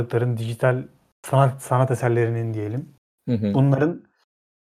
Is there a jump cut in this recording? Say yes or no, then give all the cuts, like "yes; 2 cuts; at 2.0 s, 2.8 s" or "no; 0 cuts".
no; 0 cuts